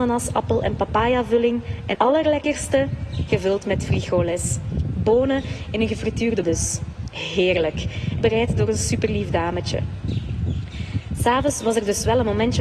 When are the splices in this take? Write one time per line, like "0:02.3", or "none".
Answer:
0:01.9
0:03.3
0:06.4
0:08.2